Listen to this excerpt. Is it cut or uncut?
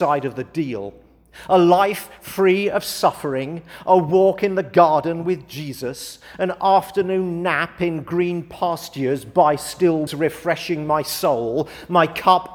cut